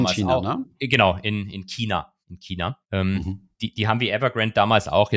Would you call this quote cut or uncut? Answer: cut